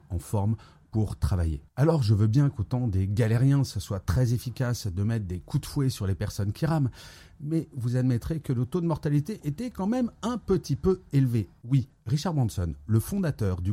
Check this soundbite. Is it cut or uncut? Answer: uncut